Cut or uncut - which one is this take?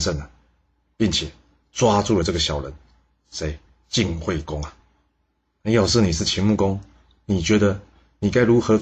uncut